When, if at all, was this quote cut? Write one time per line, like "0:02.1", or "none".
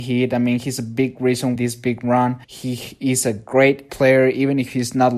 0:01.6
0:02.4
0:03.9